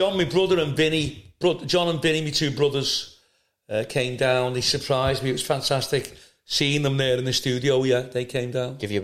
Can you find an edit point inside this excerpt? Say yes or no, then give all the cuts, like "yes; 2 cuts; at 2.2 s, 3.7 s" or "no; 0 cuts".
no; 0 cuts